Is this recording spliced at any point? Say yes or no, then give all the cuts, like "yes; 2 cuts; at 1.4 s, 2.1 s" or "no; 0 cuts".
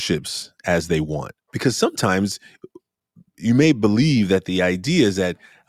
yes; 1 cut; at 1.4 s